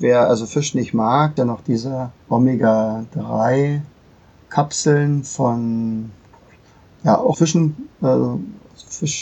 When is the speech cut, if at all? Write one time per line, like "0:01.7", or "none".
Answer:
0:01.4
0:02.2
0:07.3